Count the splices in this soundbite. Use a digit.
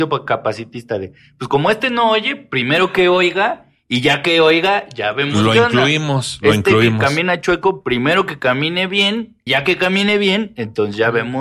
1